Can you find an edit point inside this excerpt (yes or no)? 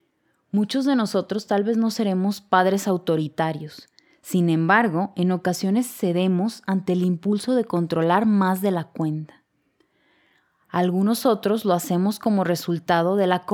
no